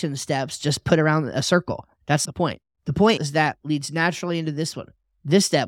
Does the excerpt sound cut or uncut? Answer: cut